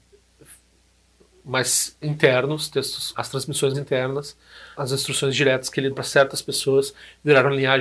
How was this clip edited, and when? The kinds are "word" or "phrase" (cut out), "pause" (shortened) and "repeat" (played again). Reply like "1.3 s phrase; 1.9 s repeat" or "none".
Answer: 2.0 s word; 3.1 s phrase; 3.7 s word; 4.7 s word; 5.9 s word